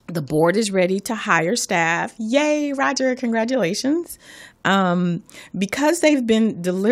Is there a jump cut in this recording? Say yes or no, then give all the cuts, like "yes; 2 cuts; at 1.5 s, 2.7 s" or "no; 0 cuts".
no; 0 cuts